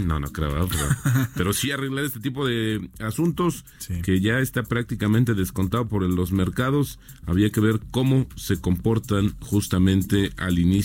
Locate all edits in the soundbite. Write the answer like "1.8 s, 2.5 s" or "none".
none